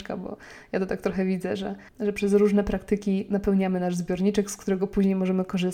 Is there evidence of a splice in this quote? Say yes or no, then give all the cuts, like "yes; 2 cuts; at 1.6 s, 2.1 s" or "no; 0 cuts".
yes; 1 cut; at 1.9 s